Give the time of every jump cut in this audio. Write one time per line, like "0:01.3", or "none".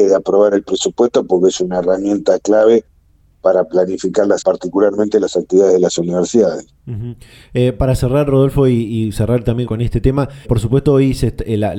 0:04.4
0:09.7
0:10.4